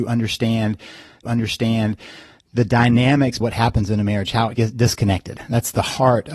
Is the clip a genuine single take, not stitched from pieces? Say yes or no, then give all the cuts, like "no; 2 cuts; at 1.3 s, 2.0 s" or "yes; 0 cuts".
no; 3 cuts; at 1.2 s, 3.4 s, 4.5 s